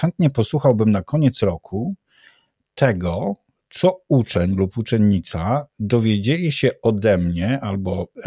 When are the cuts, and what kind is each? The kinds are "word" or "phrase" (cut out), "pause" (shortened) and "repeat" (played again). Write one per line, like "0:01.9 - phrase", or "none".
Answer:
none

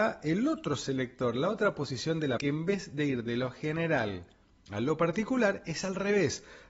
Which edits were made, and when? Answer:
0:02.4 - word

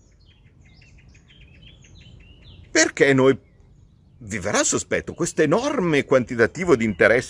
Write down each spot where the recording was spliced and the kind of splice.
none

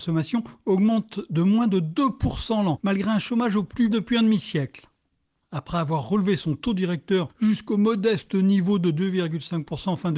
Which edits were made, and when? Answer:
0:03.9 - word

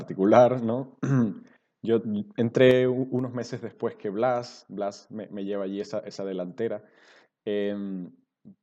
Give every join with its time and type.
none

